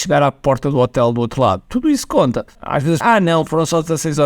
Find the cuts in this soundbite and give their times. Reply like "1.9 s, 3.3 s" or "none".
2.5 s, 3.0 s